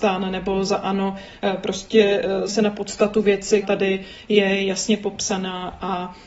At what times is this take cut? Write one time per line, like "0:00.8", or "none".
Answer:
0:02.5
0:03.6